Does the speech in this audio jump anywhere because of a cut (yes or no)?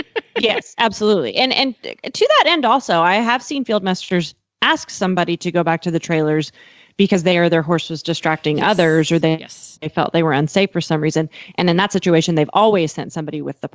yes